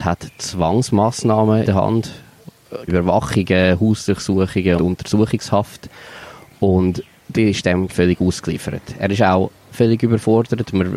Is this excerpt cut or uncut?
cut